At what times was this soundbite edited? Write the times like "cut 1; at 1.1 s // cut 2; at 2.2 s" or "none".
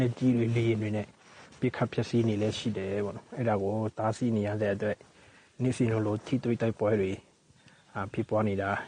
none

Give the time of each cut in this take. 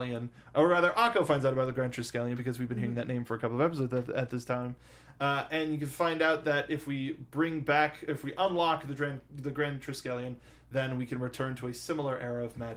none

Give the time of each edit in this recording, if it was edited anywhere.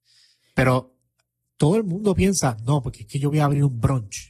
none

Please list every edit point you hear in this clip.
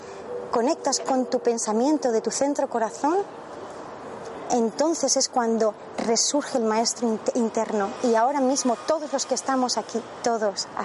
none

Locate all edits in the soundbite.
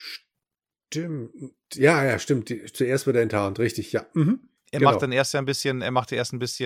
none

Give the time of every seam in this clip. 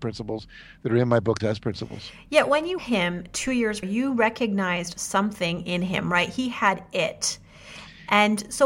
cut 1; at 1.4 s // cut 2; at 2.8 s // cut 3; at 3.8 s

